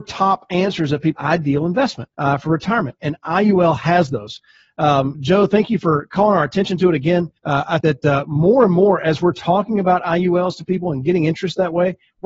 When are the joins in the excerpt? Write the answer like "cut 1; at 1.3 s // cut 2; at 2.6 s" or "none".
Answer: cut 1; at 1.2 s // cut 2; at 2.1 s // cut 3; at 5.1 s // cut 4; at 7.4 s // cut 5; at 7.8 s